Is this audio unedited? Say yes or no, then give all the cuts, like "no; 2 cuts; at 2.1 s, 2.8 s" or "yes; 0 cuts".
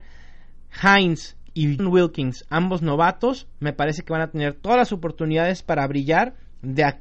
no; 1 cut; at 1.8 s